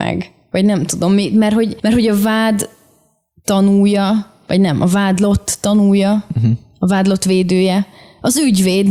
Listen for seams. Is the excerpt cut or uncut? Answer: uncut